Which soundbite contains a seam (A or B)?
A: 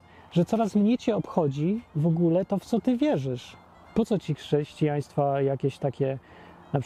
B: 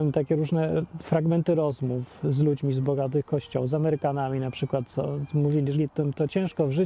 B